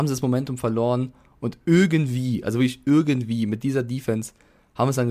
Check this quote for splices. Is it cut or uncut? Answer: uncut